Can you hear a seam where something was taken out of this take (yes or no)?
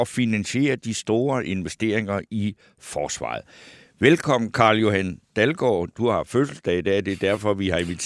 no